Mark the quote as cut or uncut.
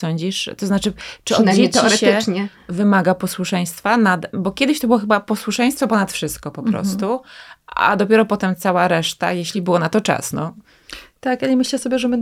uncut